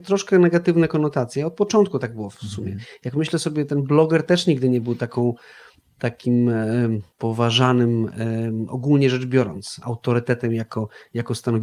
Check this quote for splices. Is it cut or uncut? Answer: cut